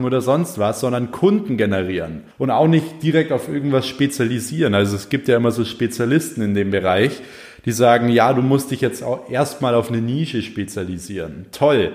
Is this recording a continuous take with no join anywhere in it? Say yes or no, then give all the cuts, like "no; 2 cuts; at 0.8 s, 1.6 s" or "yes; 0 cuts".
no; 1 cut; at 2.3 s